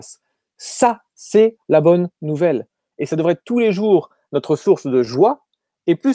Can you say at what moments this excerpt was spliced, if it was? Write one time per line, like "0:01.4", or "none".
none